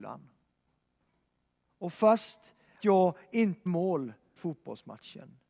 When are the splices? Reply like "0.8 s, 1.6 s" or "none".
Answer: 2.8 s, 3.7 s, 4.4 s